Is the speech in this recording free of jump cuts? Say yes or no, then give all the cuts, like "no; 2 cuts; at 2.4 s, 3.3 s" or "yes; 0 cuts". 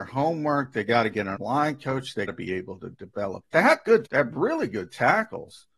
no; 4 cuts; at 1.3 s, 2.3 s, 3.4 s, 4.0 s